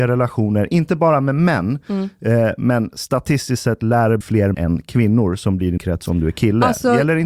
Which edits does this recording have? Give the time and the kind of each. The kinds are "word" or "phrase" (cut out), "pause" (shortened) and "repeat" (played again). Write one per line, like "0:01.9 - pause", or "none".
0:04.2 - word
0:04.5 - word
0:05.8 - word

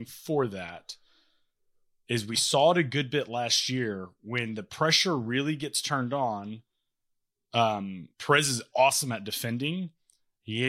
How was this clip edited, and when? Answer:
0:08.1 - pause

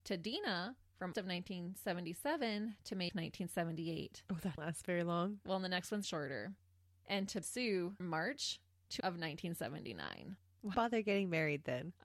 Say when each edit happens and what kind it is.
0:01.1 - word
0:03.1 - word
0:04.6 - word
0:06.0 - word
0:07.4 - word
0:08.0 - word
0:09.0 - word
0:10.7 - word

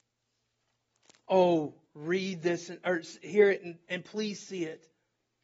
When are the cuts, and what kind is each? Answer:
none

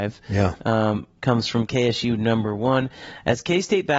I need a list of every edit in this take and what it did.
none

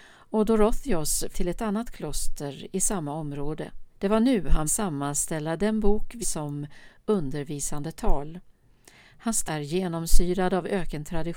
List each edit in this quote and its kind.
0:01.3 - word
0:03.9 - pause
0:04.7 - word
0:06.2 - word
0:09.5 - word

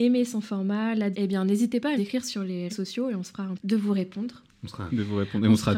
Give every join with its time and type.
0:01.1 - word
0:02.0 - word
0:02.7 - word
0:03.6 - word
0:04.9 - word

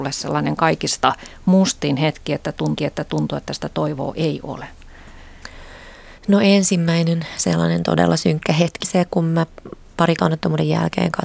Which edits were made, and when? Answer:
0:02.8 - repeat
0:06.2 - pause
0:08.8 - word
0:10.2 - word

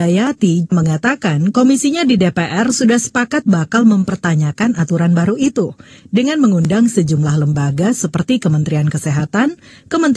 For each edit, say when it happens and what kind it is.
none

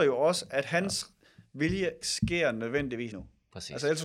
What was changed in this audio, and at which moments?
0:02.0 - word
0:03.1 - word

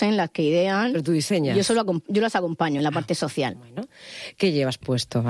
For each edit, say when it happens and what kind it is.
none

